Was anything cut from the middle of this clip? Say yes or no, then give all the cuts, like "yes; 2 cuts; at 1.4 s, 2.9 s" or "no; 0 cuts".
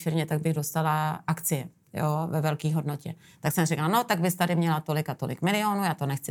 no; 0 cuts